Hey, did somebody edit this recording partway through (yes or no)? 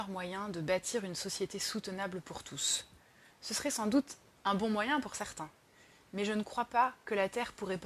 no